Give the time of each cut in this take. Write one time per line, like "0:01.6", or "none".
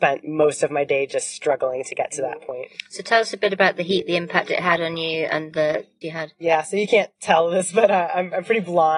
0:06.0